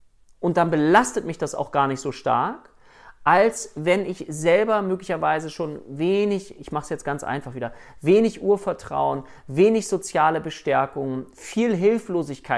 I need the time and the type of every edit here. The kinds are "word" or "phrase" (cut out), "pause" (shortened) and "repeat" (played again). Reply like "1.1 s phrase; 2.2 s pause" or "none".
none